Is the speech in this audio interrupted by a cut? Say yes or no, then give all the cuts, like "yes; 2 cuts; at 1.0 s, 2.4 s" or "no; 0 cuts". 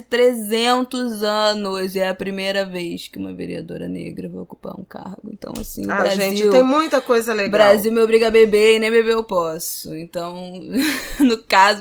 no; 0 cuts